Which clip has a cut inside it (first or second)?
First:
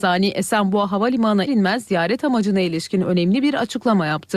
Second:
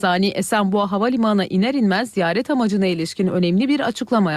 first